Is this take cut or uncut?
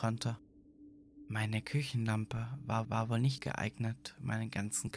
cut